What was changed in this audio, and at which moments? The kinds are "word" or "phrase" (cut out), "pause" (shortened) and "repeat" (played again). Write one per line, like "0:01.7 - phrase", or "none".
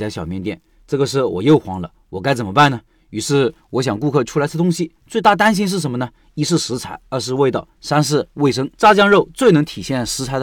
0:08.7 - pause